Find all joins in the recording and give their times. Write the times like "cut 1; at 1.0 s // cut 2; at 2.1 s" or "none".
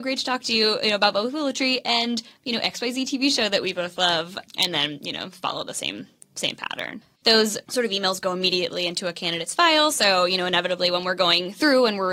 none